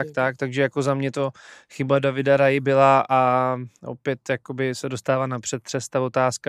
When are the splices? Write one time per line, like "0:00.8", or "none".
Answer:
none